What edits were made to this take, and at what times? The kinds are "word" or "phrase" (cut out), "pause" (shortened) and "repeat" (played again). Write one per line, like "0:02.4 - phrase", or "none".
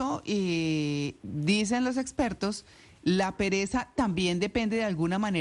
0:01.2 - word

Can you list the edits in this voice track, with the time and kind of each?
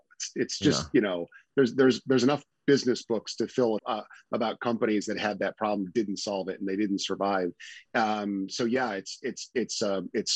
0:03.8 - word

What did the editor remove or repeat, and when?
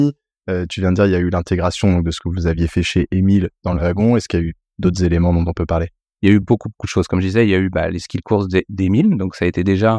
none

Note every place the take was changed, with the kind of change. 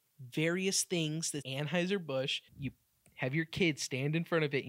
0:01.4 - word
0:02.5 - pause

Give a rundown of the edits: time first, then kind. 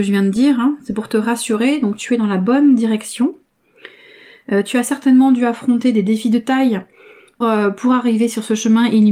0:07.4 - word

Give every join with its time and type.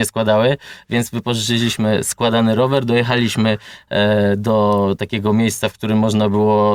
none

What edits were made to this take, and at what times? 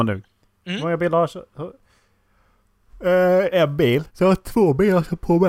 0:03.5 - phrase
0:04.1 - pause

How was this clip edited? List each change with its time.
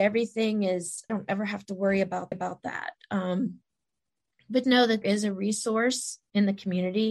0:01.1 - phrase
0:02.3 - repeat
0:04.6 - word
0:05.0 - word

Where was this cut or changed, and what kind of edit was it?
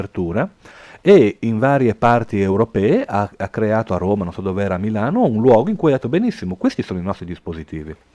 none

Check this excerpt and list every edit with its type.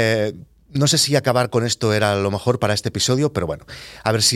none

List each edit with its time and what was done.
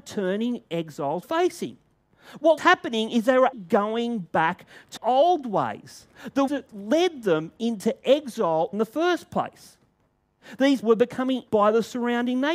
0:01.2 - word
0:02.6 - word
0:03.5 - word
0:05.0 - word
0:06.5 - word
0:08.7 - word
0:10.8 - word
0:11.5 - word

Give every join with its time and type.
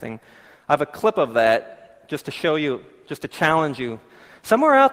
none

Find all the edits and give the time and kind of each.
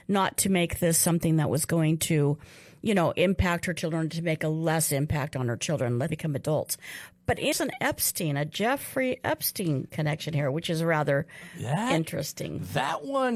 0:06.1 - word
0:07.5 - phrase

